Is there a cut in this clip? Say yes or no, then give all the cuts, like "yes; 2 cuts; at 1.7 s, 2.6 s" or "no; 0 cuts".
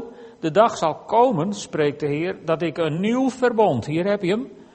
no; 0 cuts